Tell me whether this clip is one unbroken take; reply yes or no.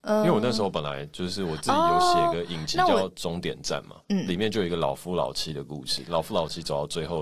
no